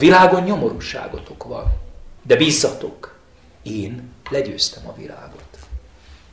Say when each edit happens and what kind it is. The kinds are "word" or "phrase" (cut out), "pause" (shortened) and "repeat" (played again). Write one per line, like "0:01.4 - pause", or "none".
0:02.2 - pause